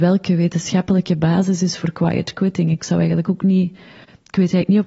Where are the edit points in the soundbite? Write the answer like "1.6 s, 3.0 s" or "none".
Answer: none